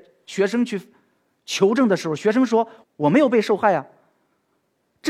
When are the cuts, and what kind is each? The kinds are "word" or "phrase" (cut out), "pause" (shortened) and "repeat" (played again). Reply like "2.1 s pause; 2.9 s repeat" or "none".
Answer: none